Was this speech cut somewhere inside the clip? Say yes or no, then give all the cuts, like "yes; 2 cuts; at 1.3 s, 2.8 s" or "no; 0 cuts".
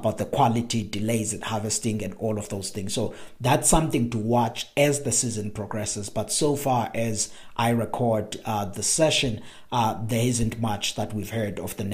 no; 0 cuts